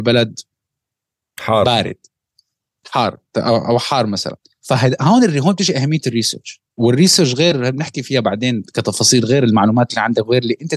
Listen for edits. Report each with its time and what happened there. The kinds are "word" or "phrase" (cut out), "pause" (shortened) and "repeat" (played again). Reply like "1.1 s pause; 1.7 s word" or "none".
4.5 s pause; 6.7 s pause